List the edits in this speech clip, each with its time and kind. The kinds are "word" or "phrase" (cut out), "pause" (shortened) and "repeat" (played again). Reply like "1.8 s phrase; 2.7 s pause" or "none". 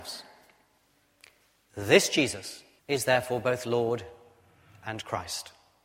2.8 s pause